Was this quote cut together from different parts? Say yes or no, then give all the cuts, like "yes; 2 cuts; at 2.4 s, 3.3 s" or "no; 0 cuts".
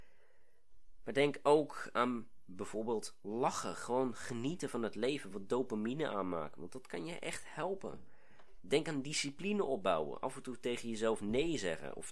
no; 0 cuts